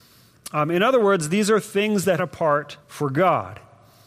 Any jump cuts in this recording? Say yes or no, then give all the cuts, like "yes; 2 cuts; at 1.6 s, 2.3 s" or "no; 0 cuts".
yes; 2 cuts; at 2.2 s, 2.8 s